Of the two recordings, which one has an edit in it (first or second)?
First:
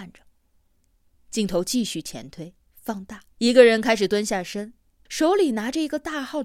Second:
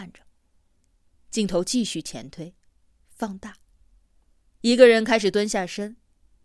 first